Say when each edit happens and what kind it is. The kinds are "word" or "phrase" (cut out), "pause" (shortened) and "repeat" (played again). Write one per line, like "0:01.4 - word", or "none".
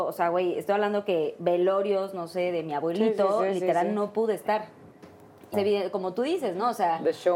0:05.5 - word